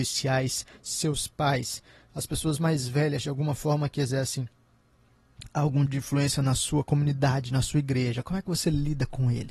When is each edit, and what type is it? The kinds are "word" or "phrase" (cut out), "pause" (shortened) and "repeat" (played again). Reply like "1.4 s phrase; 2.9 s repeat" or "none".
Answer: 5.9 s word